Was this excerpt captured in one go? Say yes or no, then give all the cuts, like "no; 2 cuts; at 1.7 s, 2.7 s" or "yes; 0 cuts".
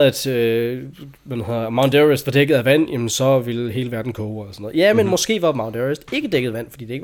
yes; 0 cuts